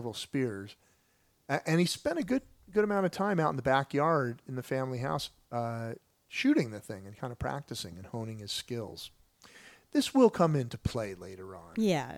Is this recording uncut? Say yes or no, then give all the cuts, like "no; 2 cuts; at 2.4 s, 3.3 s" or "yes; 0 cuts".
yes; 0 cuts